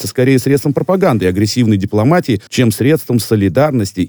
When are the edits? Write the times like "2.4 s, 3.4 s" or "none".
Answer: 2.5 s